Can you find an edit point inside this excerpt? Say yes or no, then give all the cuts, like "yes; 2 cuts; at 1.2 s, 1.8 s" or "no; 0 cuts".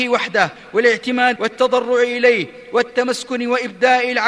yes; 1 cut; at 1.4 s